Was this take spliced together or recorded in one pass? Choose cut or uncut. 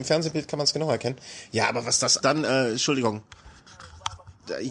cut